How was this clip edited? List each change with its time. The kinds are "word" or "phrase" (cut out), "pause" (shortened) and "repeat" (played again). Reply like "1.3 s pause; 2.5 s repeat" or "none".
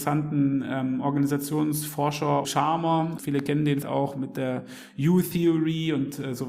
2.4 s word; 3.2 s word; 3.8 s word

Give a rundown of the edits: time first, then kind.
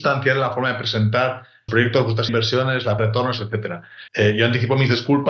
1.7 s word; 2.3 s phrase; 3.0 s phrase; 4.1 s pause

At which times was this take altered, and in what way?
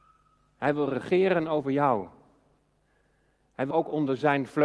3.7 s word

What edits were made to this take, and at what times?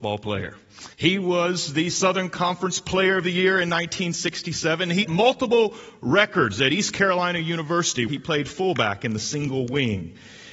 0.9 s pause; 5.0 s phrase; 8.1 s word

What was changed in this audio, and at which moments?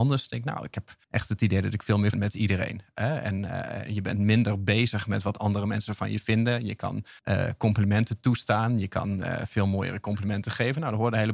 1.0 s pause; 2.1 s phrase; 7.2 s pause

